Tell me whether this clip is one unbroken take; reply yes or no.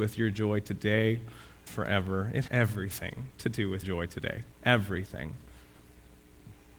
no